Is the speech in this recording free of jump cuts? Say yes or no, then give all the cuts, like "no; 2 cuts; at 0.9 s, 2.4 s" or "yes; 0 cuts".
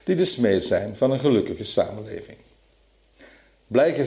yes; 0 cuts